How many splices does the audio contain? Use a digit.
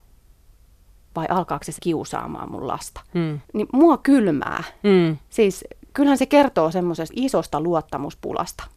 3